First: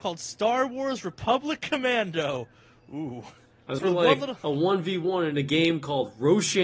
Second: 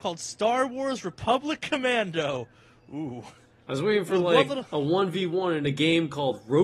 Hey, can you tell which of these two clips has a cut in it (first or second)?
first